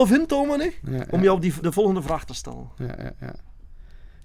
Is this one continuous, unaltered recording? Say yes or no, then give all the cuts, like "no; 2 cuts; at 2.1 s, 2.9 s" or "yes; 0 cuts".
no; 2 cuts; at 1.6 s, 2.3 s